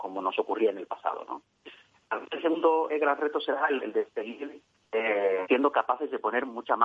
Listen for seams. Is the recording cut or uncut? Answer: cut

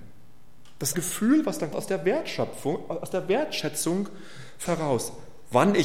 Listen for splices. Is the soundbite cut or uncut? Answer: cut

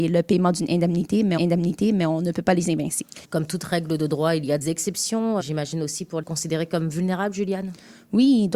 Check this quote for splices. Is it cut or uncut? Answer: cut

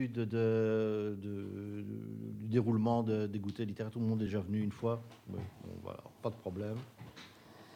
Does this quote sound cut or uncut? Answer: uncut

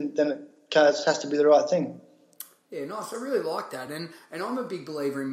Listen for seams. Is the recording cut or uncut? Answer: uncut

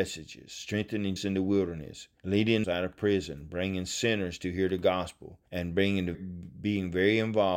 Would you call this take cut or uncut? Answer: cut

